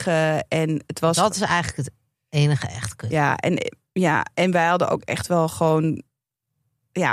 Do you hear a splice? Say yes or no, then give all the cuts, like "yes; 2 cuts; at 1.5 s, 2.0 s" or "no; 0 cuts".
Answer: no; 0 cuts